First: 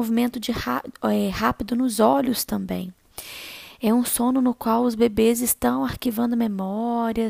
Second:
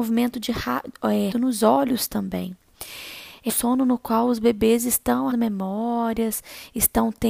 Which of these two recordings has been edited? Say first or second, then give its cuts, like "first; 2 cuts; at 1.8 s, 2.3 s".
second; 3 cuts; at 1.3 s, 3.5 s, 5.3 s